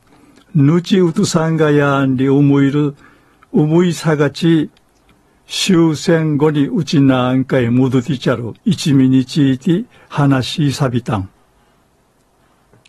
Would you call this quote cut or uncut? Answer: cut